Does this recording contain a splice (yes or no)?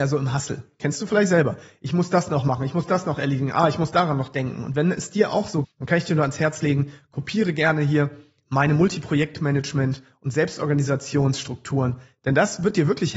yes